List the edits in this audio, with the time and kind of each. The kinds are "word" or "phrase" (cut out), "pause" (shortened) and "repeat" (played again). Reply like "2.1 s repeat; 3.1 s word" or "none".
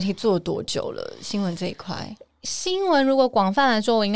none